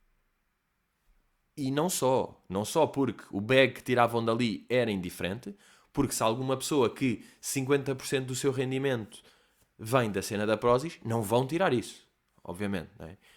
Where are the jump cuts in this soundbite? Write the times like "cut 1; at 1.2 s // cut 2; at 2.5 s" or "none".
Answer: none